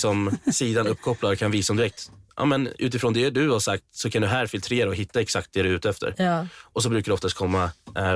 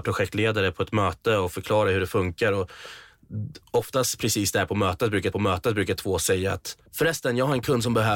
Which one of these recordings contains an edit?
second; 2 cuts; at 5.3 s, 6.9 s

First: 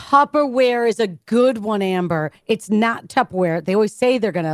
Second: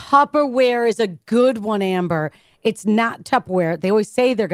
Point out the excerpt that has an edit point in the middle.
first; 1 cut; at 2.4 s

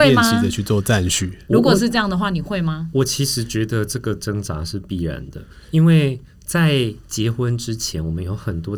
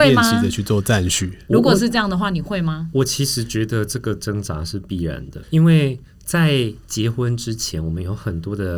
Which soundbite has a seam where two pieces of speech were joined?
second; 1 cut; at 5.4 s

